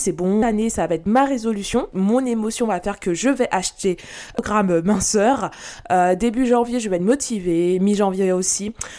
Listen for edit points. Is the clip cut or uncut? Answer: uncut